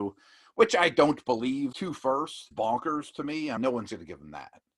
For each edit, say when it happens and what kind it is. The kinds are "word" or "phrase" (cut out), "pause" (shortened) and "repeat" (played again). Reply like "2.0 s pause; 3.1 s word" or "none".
1.7 s word; 2.5 s word; 3.6 s word